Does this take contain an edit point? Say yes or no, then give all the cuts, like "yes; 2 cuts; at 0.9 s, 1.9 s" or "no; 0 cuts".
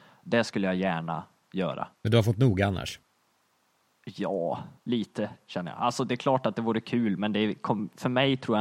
yes; 2 cuts; at 1.9 s, 4.8 s